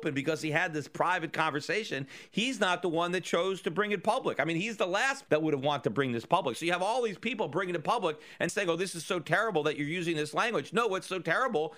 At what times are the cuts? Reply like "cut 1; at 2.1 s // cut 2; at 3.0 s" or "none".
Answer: cut 1; at 5.3 s // cut 2; at 8.5 s